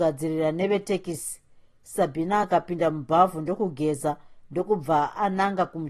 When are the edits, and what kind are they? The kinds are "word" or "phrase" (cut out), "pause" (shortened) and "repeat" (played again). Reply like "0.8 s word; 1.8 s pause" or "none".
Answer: none